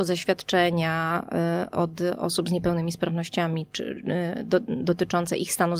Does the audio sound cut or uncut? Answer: cut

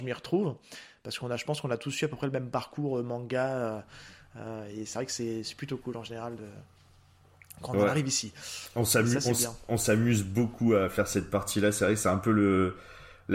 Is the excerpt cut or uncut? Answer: uncut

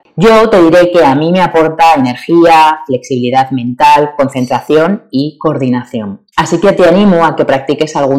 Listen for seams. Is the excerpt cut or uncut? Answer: cut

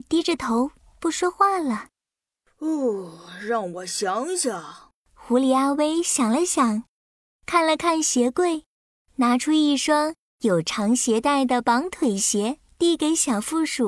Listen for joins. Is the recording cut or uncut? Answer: uncut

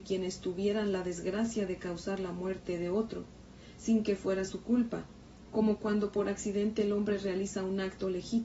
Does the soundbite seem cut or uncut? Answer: uncut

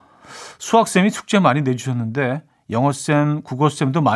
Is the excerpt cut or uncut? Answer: uncut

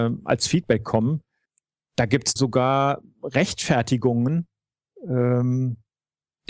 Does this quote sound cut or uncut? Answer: cut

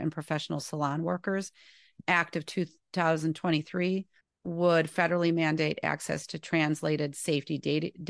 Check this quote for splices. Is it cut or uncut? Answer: cut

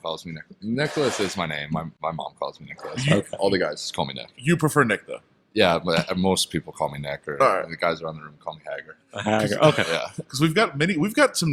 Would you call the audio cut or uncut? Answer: uncut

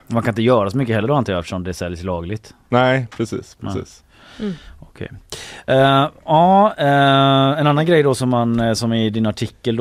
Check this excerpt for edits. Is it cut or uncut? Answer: uncut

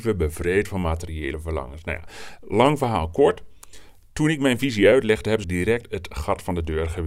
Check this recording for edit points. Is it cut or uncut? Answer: cut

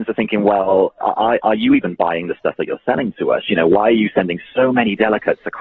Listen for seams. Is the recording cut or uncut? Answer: uncut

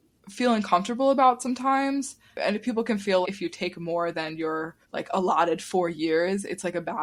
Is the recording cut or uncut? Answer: cut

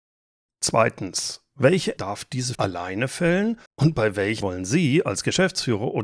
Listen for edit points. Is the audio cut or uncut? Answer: cut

